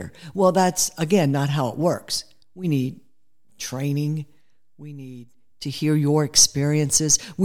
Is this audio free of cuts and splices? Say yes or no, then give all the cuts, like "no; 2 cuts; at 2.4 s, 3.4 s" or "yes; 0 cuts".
yes; 0 cuts